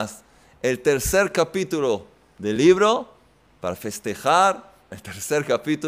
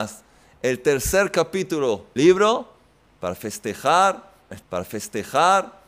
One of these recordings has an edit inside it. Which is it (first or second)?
second